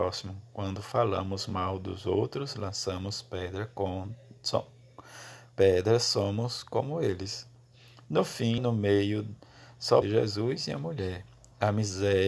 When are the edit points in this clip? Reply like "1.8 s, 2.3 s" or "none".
8.6 s, 10.0 s